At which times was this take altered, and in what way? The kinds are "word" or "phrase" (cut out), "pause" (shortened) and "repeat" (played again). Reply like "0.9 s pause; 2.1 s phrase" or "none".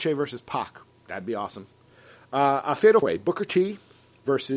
3.0 s word